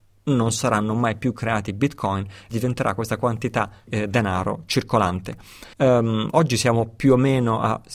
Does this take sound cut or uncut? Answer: cut